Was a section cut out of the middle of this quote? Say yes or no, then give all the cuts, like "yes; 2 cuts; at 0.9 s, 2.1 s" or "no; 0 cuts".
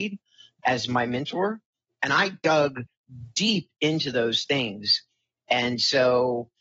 no; 0 cuts